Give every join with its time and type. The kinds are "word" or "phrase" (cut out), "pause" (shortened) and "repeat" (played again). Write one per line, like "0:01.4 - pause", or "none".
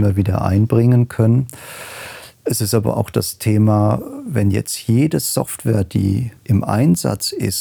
0:02.3 - pause
0:06.4 - pause